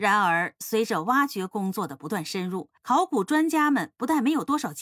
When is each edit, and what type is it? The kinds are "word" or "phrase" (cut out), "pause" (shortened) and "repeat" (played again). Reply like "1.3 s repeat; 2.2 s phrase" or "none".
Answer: 2.8 s pause